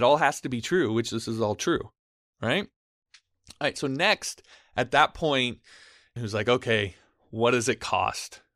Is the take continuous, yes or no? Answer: no